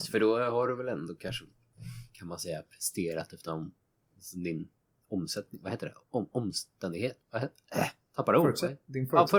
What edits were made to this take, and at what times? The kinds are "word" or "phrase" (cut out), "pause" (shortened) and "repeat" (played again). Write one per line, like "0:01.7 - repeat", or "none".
0:03.5 - word
0:06.0 - pause